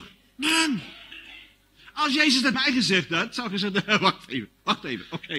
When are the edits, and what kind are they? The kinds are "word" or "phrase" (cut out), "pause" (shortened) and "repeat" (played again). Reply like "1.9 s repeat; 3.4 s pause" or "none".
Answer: 2.5 s word